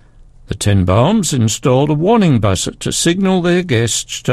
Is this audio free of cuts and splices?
yes; 0 cuts

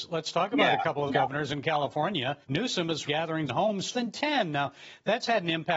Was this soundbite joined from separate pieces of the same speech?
yes; 5 cuts; at 1.1 s, 2.4 s, 3.0 s, 3.5 s, 3.9 s

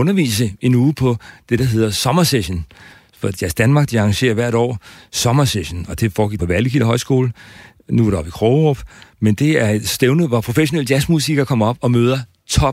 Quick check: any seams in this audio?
yes; 1 cut; at 6.4 s

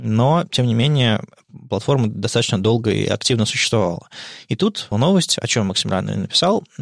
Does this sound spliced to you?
yes; 1 cut; at 4.9 s

